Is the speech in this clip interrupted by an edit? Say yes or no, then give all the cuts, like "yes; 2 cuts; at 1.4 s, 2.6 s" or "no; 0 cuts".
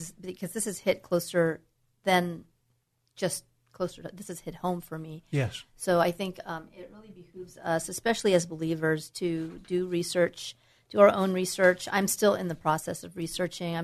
no; 0 cuts